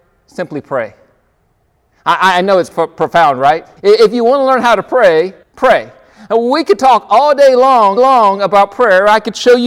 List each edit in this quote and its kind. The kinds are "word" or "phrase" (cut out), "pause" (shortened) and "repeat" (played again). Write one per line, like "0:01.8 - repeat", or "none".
0:02.7 - word
0:03.8 - pause
0:05.4 - pause
0:08.0 - repeat